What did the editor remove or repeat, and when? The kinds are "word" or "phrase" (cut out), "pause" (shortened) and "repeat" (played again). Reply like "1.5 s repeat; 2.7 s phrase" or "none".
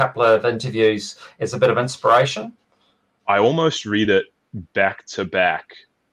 none